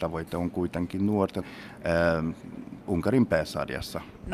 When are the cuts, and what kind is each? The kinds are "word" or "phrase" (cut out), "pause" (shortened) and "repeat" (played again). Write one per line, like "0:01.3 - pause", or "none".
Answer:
0:01.4 - phrase